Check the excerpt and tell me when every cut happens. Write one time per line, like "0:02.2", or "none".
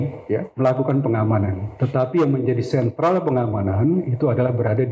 none